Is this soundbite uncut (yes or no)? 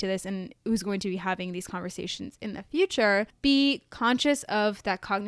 no